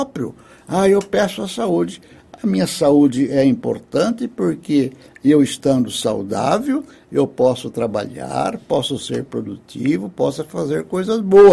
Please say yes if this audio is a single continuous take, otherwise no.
yes